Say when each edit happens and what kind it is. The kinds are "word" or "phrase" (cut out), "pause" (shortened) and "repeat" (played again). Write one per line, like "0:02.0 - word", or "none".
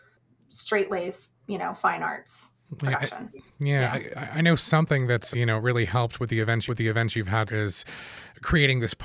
0:01.4 - pause
0:02.7 - pause
0:05.3 - word
0:06.7 - repeat
0:07.5 - phrase